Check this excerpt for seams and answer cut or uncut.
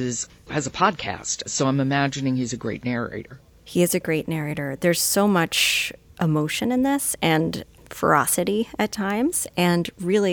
uncut